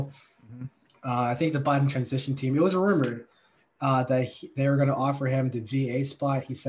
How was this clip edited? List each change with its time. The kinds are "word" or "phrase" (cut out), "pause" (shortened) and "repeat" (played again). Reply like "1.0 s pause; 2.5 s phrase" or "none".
none